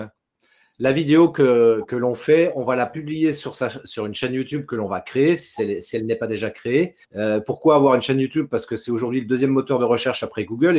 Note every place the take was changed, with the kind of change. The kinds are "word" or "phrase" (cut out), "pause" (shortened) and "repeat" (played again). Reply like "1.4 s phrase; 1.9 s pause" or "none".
7.0 s pause